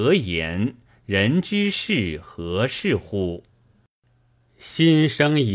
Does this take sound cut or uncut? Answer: uncut